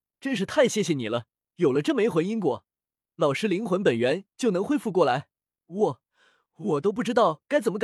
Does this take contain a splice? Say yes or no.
no